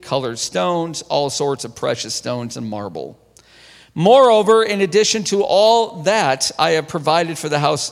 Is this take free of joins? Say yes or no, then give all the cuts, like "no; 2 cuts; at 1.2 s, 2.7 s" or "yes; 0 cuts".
yes; 0 cuts